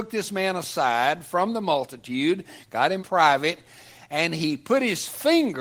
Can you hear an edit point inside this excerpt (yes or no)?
yes